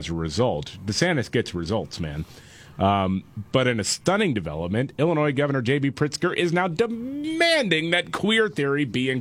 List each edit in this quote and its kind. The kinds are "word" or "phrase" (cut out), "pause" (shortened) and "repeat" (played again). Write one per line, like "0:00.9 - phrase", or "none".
none